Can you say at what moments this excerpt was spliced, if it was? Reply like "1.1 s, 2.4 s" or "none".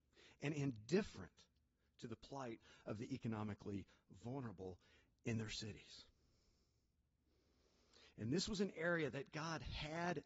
none